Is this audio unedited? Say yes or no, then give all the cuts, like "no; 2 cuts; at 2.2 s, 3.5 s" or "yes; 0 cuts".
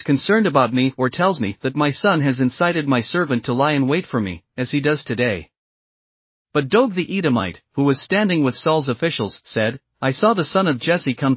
yes; 0 cuts